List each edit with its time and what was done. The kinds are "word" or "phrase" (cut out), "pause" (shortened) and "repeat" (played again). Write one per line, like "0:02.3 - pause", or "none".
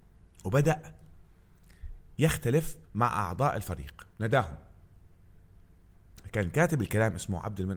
0:02.8 - pause
0:04.1 - pause

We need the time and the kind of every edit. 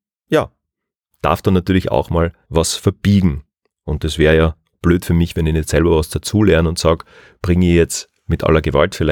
0:02.4 - pause

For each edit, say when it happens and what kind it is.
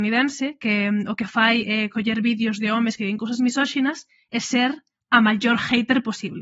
none

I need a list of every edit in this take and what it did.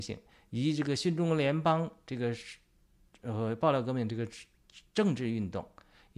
none

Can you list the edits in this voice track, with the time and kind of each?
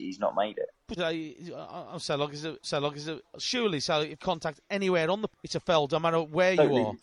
0:01.0 - word
0:02.6 - repeat
0:04.2 - phrase
0:05.3 - word

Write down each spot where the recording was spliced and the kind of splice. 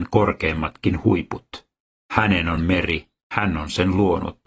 none

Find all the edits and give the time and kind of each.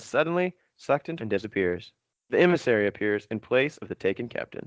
0:01.2 - phrase
0:02.1 - pause

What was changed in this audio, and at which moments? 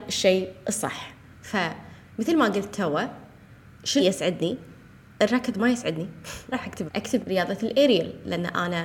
0:04.0 - word
0:06.5 - word
0:06.9 - word
0:07.2 - word

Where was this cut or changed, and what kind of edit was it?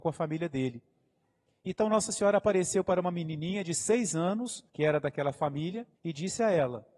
0:04.7 - pause
0:05.9 - pause

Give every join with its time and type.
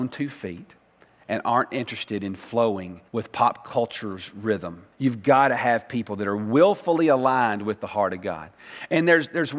0:03.1 - pause
0:04.9 - pause

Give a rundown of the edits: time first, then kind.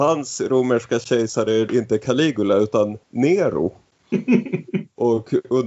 0:01.7 - word
0:03.0 - pause

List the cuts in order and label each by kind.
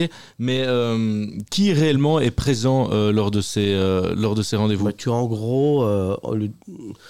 0:01.5 - word

